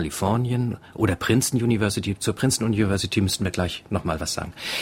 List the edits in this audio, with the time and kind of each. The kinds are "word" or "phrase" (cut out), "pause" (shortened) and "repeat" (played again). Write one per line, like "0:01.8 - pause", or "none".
none